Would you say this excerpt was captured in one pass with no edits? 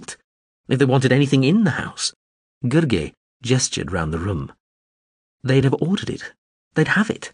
yes; 0 cuts

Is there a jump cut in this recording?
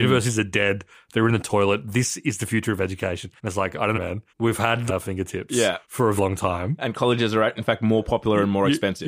yes; 6 cuts; at 3.4 s, 3.9 s, 4.3 s, 4.9 s, 5.8 s, 6.2 s

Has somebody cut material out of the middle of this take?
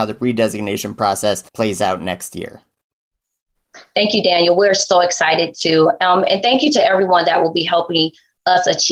yes; 1 cut; at 1.5 s

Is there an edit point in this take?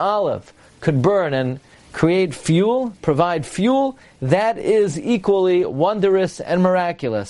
no; 0 cuts

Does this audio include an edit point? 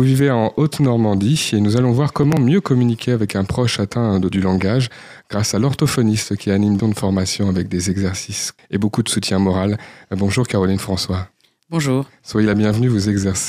yes; 3 cuts; at 4.3 s, 6.8 s, 8.6 s

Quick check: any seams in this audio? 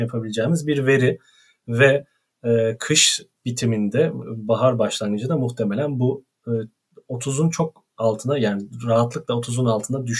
no; 0 cuts

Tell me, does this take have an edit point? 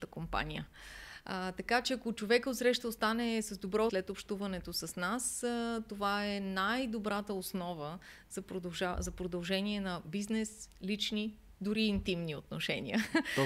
yes; 1 cut; at 3.9 s

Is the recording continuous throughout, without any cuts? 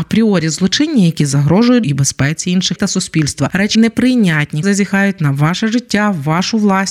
no; 4 cuts; at 1.8 s, 2.8 s, 3.7 s, 4.6 s

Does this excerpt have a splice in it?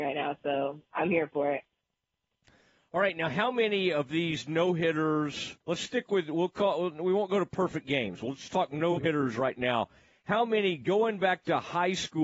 yes; 1 cut; at 5.6 s

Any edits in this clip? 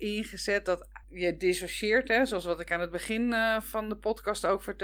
yes; 1 cut; at 1.0 s

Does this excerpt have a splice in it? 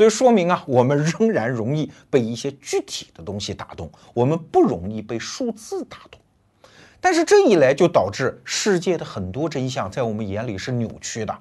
no; 0 cuts

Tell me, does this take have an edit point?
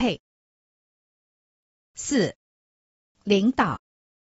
no; 0 cuts

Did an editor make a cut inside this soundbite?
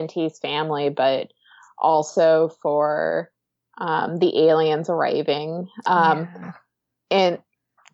no; 0 cuts

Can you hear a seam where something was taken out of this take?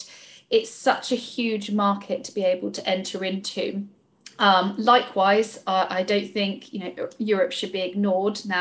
no; 0 cuts

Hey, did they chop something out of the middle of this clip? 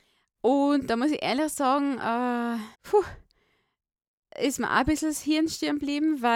yes; 1 cut; at 2.7 s

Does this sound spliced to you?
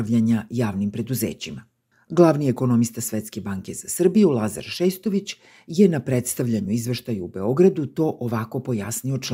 no; 0 cuts

